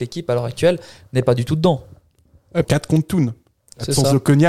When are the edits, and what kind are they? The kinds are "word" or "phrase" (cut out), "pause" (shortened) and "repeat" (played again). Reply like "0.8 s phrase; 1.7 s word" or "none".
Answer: 2.6 s phrase